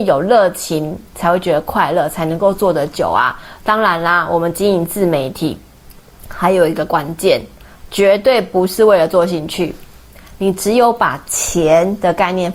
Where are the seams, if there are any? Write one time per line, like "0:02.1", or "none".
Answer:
none

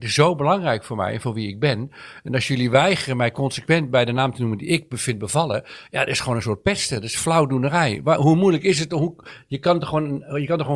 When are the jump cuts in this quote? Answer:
none

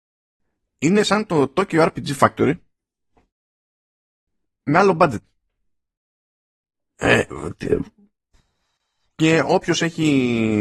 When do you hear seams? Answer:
none

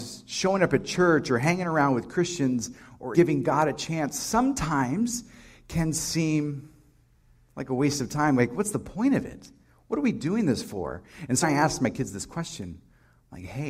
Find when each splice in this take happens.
0:03.1
0:11.4

